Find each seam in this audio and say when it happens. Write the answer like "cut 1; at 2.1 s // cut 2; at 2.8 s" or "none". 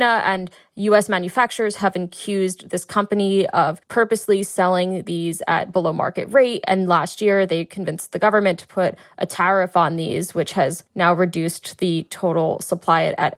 cut 1; at 3.8 s // cut 2; at 10.9 s